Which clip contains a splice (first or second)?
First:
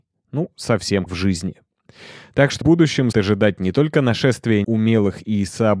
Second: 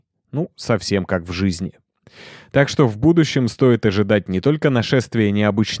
first